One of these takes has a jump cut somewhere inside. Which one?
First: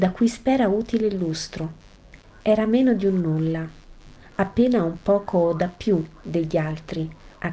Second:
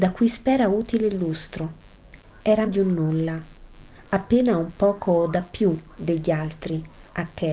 second; 1 cut; at 2.7 s

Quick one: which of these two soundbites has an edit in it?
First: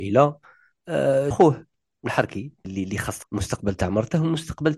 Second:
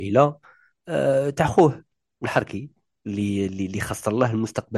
first; 3 cuts; at 1.3 s, 2.6 s, 3.2 s

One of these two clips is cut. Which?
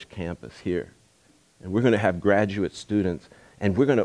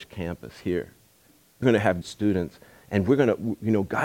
second; 2 cuts; at 1.6 s, 2.0 s

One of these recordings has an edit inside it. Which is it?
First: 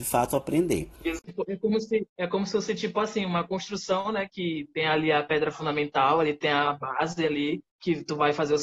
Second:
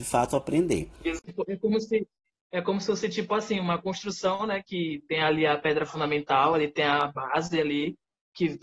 first; 2 cuts; at 2.1 s, 7.7 s

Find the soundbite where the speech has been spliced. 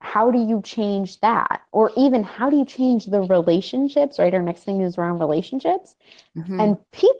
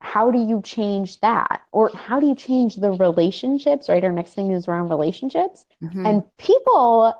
second; 2 cuts; at 1.9 s, 5.7 s

